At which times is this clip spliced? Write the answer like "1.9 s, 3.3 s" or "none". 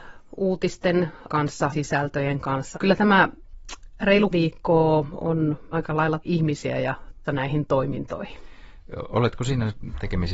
1.3 s, 1.7 s, 2.7 s, 4.3 s, 5.7 s, 6.2 s, 7.3 s